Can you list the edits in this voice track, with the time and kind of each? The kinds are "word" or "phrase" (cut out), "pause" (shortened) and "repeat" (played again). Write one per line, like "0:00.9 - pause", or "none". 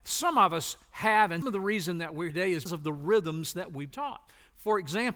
0:01.4 - word
0:02.3 - word
0:02.7 - word
0:03.9 - word